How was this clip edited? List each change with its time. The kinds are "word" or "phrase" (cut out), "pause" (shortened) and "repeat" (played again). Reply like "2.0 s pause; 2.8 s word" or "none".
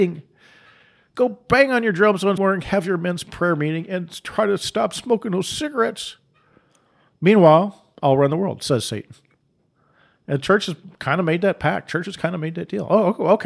2.4 s word